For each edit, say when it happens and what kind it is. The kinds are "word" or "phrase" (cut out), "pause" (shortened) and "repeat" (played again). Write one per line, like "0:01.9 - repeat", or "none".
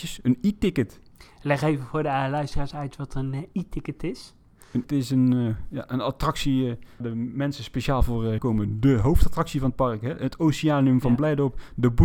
0:04.8 - word
0:07.0 - word
0:08.4 - phrase